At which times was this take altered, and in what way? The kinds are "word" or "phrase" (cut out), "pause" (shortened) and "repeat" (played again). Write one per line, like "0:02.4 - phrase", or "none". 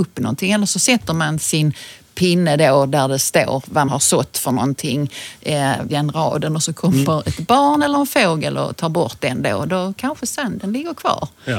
0:03.9 - word
0:05.9 - word